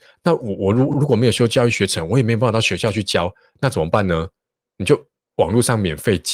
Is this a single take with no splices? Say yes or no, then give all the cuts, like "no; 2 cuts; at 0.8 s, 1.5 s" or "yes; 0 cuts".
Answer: yes; 0 cuts